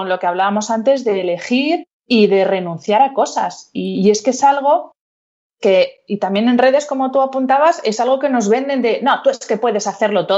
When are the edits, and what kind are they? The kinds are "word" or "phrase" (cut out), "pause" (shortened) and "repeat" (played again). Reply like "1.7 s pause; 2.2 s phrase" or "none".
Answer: 1.9 s pause